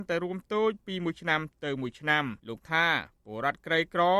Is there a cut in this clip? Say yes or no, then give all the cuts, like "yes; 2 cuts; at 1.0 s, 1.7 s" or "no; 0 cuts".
yes; 1 cut; at 2.4 s